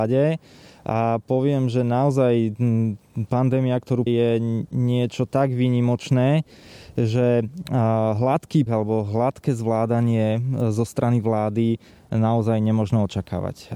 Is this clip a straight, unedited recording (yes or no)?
no